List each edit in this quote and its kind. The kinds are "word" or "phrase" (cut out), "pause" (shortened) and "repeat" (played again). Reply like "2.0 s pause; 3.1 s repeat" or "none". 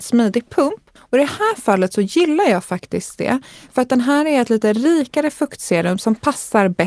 1.0 s pause